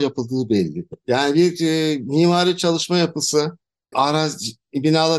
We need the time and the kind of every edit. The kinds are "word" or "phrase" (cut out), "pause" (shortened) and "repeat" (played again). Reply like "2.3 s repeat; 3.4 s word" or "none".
3.9 s word